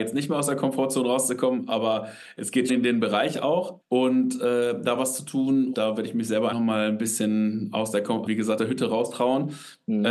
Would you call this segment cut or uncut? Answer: cut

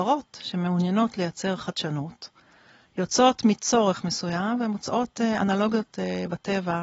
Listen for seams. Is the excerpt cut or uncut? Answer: uncut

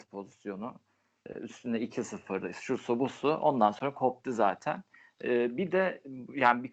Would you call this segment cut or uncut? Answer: cut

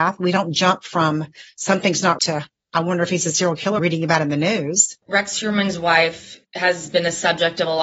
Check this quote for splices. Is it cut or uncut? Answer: cut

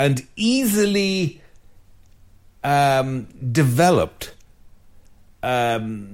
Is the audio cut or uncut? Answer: uncut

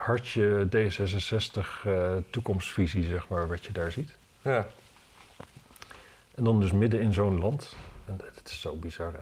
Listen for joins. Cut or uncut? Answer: uncut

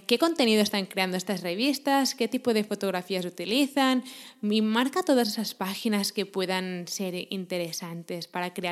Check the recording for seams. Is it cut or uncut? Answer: uncut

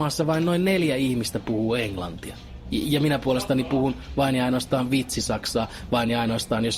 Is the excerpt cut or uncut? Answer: uncut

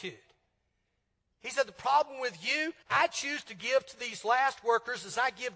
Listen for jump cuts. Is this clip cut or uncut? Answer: cut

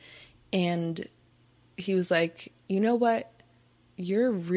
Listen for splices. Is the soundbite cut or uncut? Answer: uncut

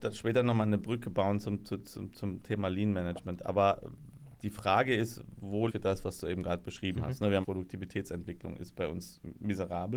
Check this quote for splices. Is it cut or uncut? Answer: cut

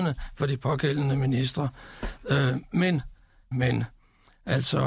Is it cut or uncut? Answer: cut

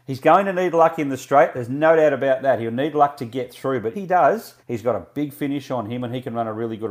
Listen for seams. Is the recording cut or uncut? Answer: cut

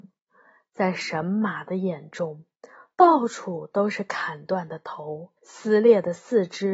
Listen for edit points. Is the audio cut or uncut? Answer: cut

